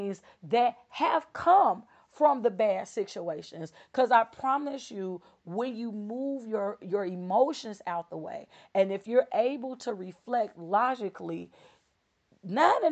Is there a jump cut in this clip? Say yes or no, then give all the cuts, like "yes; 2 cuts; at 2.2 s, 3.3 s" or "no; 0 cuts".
no; 0 cuts